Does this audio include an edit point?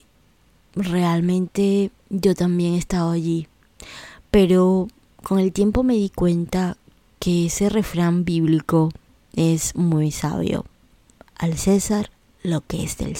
yes; 1 cut; at 1.9 s

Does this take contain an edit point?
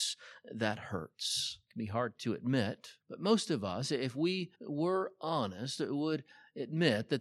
yes; 2 cuts; at 3.0 s, 4.5 s

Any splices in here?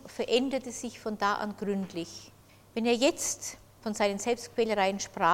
yes; 1 cut; at 2.5 s

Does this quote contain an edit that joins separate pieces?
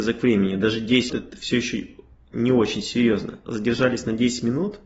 yes; 1 cut; at 1.1 s

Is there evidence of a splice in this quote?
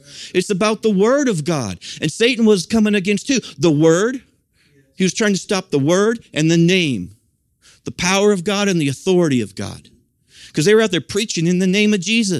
no; 0 cuts

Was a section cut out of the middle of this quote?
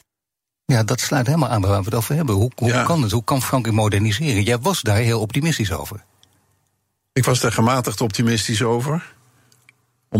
no; 0 cuts

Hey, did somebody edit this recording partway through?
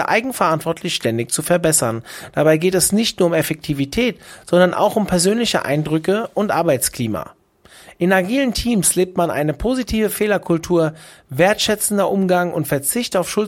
no; 0 cuts

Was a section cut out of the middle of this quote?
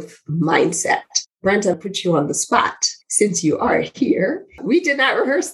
yes; 2 cuts; at 1.7 s, 3.0 s

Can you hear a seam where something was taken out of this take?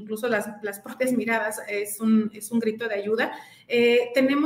no; 0 cuts

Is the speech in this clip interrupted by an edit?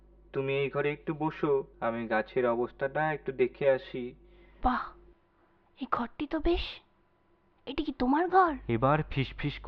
yes; 1 cut; at 1.7 s

